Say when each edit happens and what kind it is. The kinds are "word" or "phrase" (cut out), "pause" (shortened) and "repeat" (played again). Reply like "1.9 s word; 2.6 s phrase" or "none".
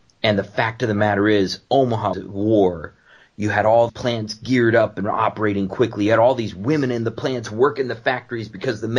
2.1 s word; 3.9 s word

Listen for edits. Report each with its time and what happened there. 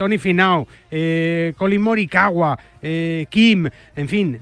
none

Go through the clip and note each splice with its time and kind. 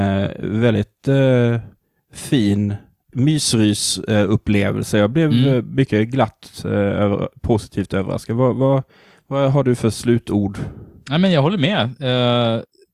none

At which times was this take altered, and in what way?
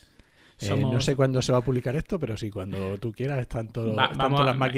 none

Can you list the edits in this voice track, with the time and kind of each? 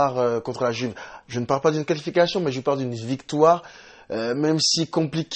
none

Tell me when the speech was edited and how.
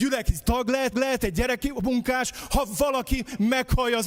0.9 s repeat

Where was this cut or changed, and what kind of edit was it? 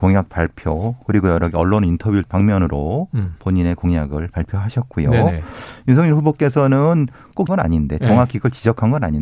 2.3 s phrase; 7.5 s word

